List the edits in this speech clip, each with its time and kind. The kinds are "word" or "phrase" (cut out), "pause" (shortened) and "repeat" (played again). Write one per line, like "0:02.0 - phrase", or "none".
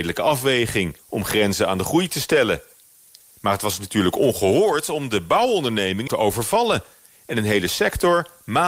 0:01.0 - pause
0:06.1 - phrase